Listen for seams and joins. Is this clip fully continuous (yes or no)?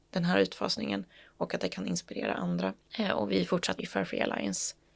no